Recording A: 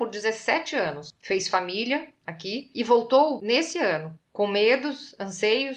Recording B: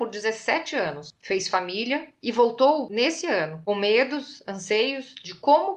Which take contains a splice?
B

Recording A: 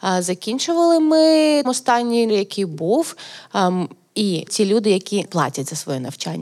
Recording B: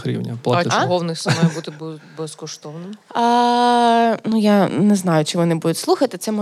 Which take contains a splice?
A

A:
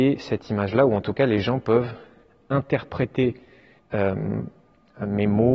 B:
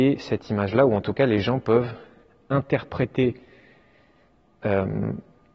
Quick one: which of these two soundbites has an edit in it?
A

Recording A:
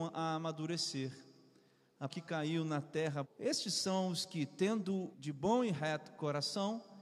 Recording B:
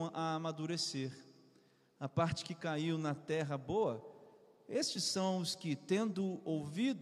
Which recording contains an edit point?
A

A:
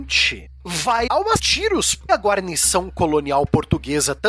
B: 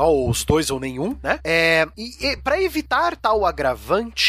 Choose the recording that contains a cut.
A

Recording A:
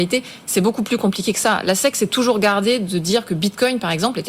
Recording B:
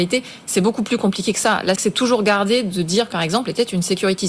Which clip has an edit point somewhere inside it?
B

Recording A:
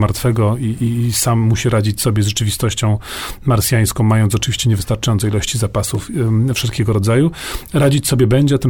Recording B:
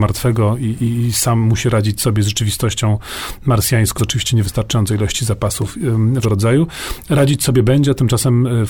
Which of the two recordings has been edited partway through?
B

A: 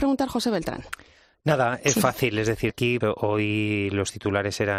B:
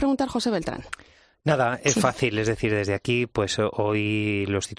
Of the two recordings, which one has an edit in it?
A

